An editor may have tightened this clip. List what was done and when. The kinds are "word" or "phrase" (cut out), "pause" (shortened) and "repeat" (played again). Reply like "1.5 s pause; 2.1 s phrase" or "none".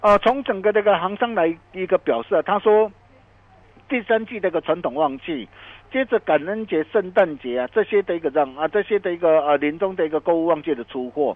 none